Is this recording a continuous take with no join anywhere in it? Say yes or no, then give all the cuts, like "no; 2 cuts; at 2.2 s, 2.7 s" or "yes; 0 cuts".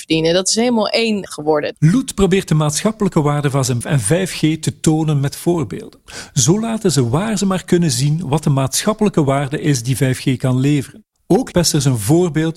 no; 3 cuts; at 1.3 s, 3.8 s, 11.5 s